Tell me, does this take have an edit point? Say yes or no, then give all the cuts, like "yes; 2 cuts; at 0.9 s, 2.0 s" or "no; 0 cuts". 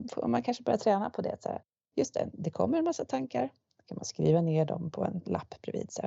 no; 0 cuts